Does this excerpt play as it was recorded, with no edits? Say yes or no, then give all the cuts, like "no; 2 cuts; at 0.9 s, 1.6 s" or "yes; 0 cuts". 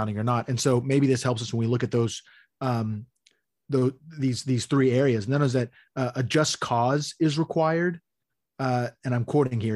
yes; 0 cuts